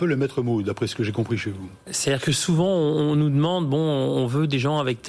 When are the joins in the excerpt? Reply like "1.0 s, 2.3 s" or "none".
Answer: none